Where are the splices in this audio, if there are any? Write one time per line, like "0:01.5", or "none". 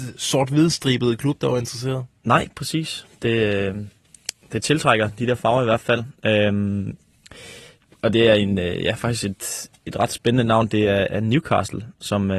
none